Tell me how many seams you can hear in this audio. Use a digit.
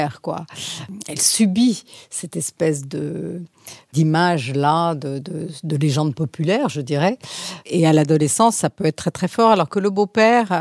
0